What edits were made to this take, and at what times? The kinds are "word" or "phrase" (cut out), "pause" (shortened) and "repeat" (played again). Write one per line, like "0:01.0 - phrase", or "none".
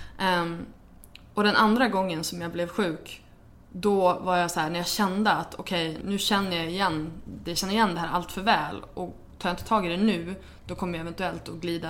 0:06.0 - word